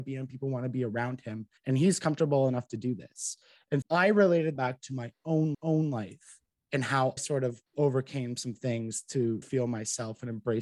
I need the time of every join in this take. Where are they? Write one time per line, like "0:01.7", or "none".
0:01.6
0:03.8
0:04.6
0:05.5
0:07.2
0:07.7
0:09.4